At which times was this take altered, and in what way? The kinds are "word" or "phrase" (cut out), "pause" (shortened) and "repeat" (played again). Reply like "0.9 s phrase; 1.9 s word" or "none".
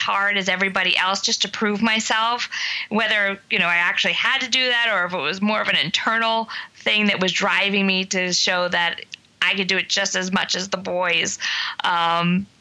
none